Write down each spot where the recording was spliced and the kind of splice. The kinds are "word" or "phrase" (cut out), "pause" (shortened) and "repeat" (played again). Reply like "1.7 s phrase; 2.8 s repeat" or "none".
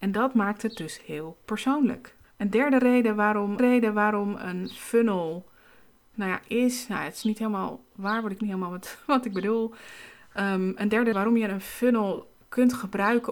2.2 s pause; 3.6 s repeat; 6.1 s word; 8.4 s phrase; 11.1 s word